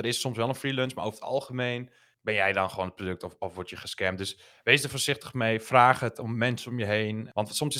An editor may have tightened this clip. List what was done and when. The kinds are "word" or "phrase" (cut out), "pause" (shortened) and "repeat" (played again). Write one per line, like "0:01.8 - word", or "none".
none